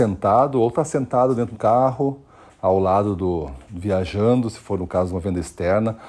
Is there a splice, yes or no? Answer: yes